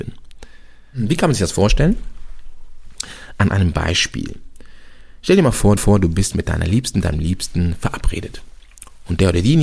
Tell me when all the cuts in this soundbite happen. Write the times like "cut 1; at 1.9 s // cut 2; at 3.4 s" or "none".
cut 1; at 5.8 s